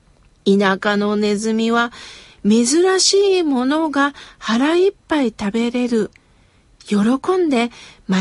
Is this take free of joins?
yes; 0 cuts

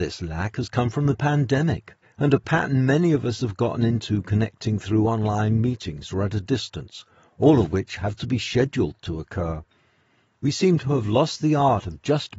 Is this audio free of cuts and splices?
yes; 0 cuts

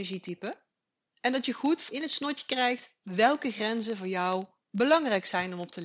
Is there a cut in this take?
yes; 1 cut; at 1.9 s

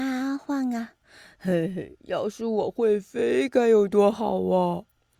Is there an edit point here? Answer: no; 0 cuts

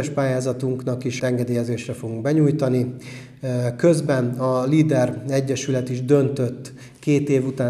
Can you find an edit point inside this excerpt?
yes; 1 cut; at 1.2 s

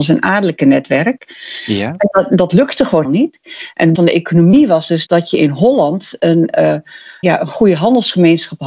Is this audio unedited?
no; 4 cuts; at 3.0 s, 3.9 s, 5.1 s, 7.2 s

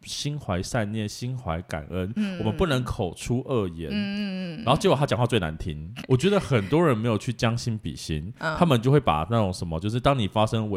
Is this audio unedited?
yes; 0 cuts

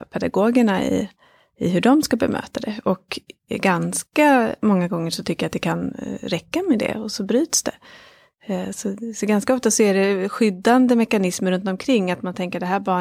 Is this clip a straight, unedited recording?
yes; 0 cuts

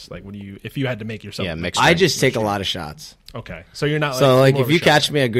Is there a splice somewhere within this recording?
no; 0 cuts

